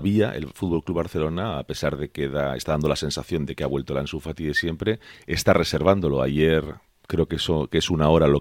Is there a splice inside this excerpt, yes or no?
no